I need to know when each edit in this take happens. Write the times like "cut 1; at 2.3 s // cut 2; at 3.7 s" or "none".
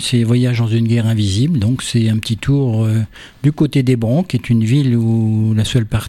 none